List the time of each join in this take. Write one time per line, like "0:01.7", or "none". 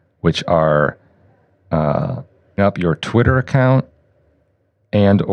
0:02.6